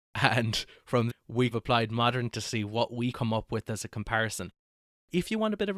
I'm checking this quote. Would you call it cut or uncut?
cut